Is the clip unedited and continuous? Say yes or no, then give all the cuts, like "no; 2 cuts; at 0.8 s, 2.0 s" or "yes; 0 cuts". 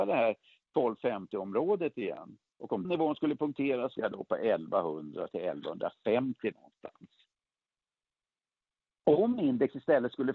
no; 3 cuts; at 2.8 s, 3.9 s, 6.5 s